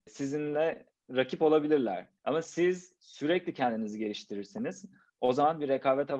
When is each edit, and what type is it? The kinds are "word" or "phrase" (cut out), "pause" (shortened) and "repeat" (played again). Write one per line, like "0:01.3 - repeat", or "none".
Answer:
0:01.0 - pause
0:02.2 - pause